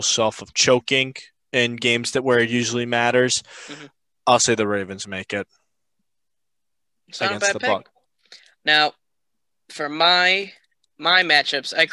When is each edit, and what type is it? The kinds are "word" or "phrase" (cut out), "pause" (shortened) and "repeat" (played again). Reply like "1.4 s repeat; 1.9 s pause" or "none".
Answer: none